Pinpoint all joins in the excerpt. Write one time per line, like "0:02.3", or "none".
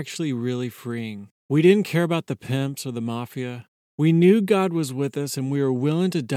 0:01.4
0:03.8

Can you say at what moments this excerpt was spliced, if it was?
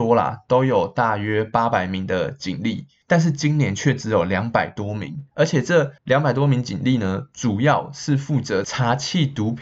0:05.3
0:06.0

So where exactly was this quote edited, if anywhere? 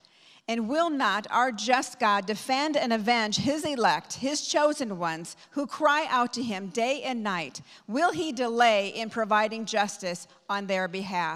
none

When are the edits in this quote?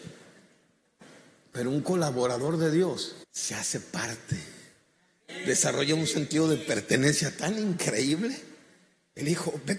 0:03.2

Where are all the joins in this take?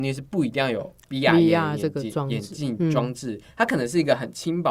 none

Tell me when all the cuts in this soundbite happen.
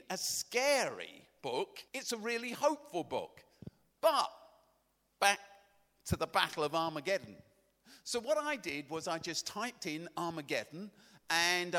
0:01.9

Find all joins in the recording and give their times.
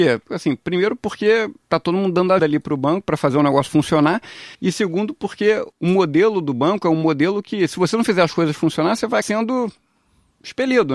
0:01.6
0:02.4
0:04.5
0:05.7
0:09.2

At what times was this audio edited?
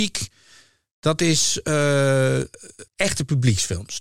0:02.9

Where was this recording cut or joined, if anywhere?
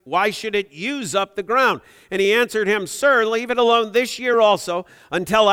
none

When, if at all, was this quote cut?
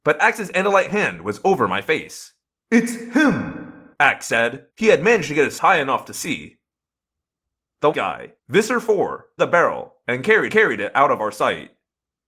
0:02.4
0:03.9
0:04.7
0:05.6
0:07.9
0:08.4
0:09.4
0:10.5

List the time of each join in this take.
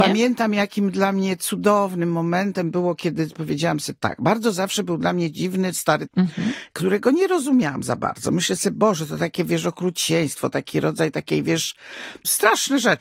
0:06.1

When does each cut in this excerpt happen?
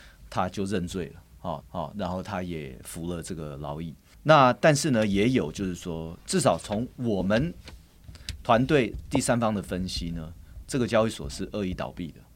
0:01.6
0:04.1

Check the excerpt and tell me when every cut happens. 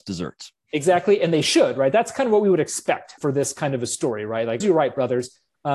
0:03.2
0:04.6

